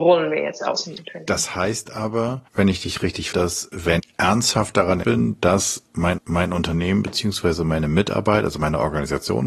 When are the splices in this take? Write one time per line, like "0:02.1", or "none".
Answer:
0:02.5
0:03.3
0:04.0
0:05.0
0:06.2